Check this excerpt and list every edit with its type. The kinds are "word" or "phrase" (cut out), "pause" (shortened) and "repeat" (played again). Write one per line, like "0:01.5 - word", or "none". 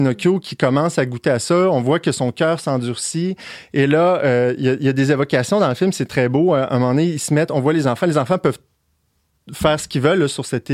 none